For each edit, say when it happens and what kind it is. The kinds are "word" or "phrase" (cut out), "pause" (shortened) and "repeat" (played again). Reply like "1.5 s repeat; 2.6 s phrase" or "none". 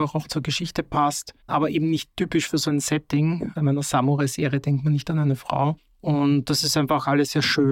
none